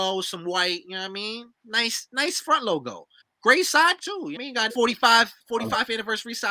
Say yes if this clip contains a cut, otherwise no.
yes